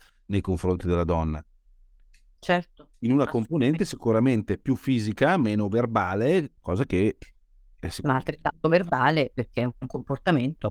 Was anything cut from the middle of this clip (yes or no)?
yes